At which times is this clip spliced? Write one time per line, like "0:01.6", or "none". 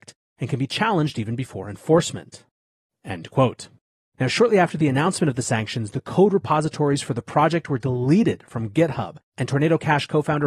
none